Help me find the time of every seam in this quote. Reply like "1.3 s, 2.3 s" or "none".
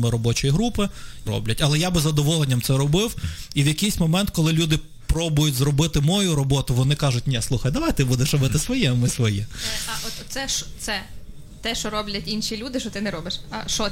1.3 s